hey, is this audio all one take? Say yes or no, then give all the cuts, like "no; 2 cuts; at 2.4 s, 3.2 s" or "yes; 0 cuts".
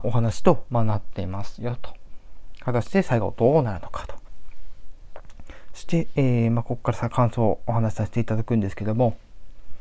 yes; 0 cuts